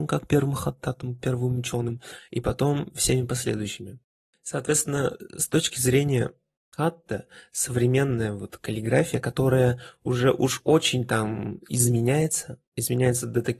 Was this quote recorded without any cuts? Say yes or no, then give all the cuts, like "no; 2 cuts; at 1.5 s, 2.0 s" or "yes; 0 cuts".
yes; 0 cuts